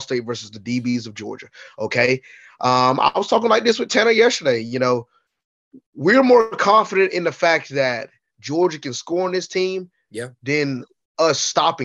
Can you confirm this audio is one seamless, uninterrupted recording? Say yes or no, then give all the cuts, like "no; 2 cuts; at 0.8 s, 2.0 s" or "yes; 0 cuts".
yes; 0 cuts